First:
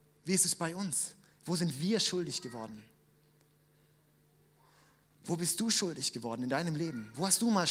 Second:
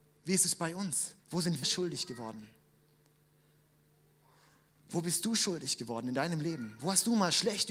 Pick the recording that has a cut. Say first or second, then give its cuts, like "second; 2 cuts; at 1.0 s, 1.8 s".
second; 2 cuts; at 1.2 s, 1.6 s